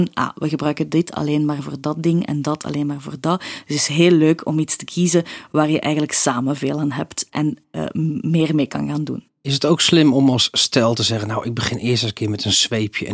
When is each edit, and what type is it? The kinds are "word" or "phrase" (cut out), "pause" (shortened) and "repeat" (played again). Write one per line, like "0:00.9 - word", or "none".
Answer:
0:09.3 - pause